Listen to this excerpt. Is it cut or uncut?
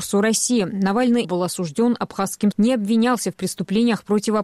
cut